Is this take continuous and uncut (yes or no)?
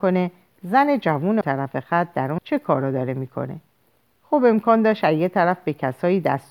no